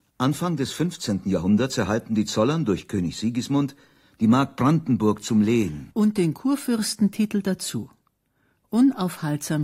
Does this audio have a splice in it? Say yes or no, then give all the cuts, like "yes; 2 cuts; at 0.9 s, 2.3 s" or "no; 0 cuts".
no; 0 cuts